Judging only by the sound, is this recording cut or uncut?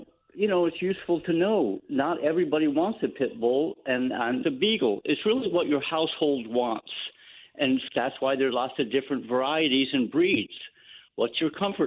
cut